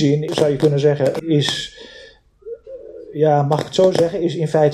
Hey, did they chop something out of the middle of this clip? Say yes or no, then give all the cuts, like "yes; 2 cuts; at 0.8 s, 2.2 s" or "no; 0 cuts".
yes; 1 cut; at 1.2 s